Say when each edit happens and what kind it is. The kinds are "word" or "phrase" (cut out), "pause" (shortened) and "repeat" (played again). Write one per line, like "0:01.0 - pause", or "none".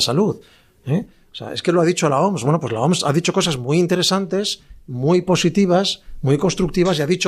none